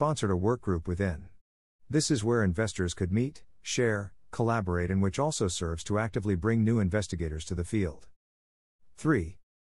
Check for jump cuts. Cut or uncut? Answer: uncut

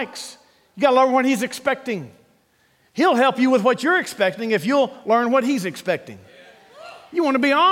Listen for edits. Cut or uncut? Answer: uncut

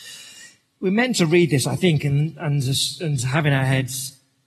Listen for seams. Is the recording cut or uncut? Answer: uncut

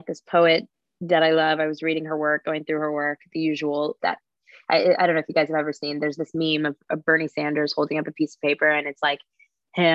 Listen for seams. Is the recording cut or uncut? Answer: cut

